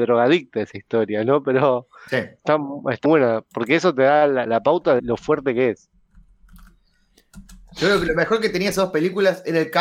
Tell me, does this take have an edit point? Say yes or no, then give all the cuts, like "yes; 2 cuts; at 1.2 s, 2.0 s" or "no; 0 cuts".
yes; 3 cuts; at 3.0 s, 4.5 s, 5.0 s